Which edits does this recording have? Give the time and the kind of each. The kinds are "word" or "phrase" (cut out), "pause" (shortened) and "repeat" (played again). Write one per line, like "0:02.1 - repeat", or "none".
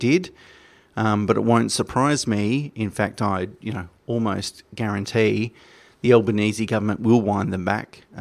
none